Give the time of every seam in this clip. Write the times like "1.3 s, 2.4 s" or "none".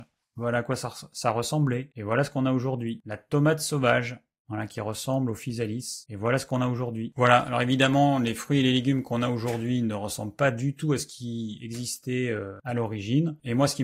none